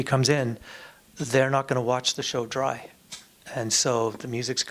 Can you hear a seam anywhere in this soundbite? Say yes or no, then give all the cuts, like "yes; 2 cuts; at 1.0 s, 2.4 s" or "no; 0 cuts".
no; 0 cuts